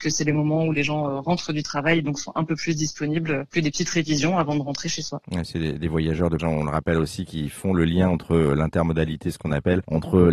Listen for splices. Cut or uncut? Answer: cut